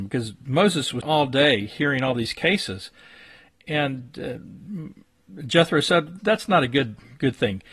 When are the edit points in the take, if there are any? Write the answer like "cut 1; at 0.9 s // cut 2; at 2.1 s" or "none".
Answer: cut 1; at 1.0 s // cut 2; at 6.2 s